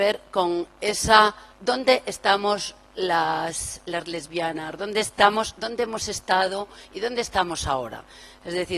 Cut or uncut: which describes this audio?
cut